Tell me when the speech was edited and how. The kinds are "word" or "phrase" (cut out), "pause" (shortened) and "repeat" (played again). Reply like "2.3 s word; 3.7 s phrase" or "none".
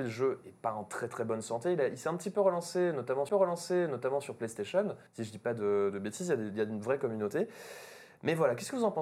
3.3 s repeat; 5.1 s pause